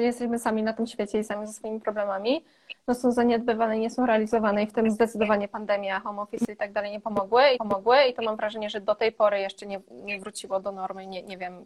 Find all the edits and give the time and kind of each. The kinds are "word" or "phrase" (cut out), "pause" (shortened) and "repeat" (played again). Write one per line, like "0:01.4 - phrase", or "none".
0:07.6 - repeat